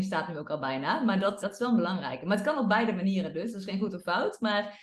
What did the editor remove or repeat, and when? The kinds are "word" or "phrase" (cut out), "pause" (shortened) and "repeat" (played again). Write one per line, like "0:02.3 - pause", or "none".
0:01.4 - word

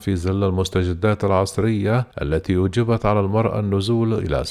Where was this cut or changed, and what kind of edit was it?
0:02.1 - pause

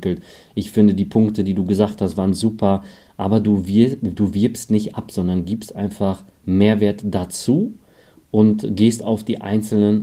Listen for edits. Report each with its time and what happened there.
none

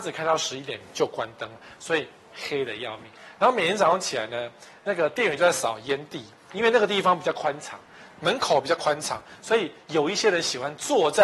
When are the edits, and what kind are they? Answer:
none

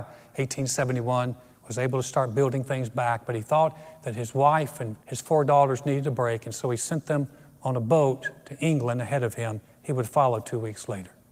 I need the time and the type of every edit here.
0:05.0 - pause

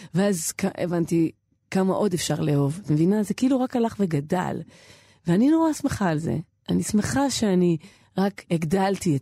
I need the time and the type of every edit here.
none

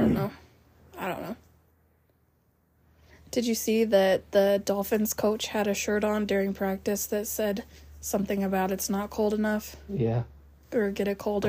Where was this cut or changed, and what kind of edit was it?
none

